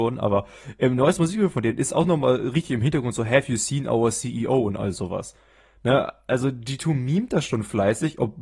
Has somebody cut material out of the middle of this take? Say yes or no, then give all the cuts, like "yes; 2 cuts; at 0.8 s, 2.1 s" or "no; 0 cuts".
no; 0 cuts